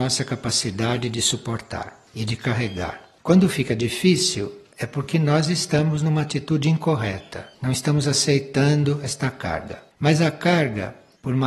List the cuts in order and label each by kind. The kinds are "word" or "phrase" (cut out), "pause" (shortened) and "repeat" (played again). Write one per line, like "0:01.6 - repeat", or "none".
0:02.1 - pause
0:03.2 - pause
0:07.5 - pause
0:09.9 - pause